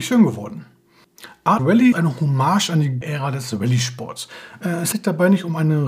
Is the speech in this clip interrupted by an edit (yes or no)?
yes